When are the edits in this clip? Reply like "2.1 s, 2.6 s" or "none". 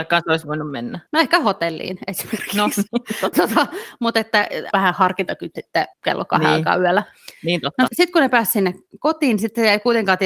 1.1 s, 3.3 s, 4.7 s, 5.6 s, 5.9 s, 7.9 s